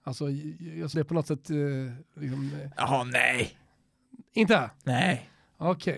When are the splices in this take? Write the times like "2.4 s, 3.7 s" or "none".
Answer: 0.9 s